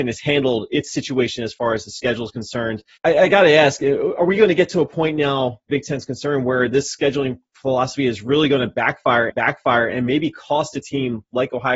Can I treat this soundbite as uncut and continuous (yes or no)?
no